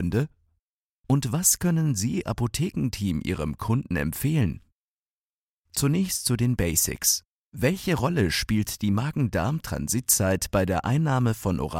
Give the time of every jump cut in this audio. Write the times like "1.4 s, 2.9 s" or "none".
2.2 s